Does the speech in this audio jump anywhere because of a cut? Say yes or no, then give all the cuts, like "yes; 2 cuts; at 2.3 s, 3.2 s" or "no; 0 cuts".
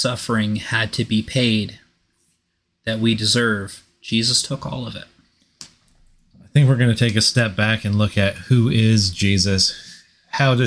no; 0 cuts